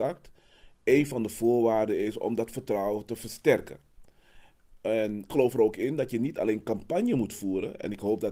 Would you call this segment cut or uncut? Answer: cut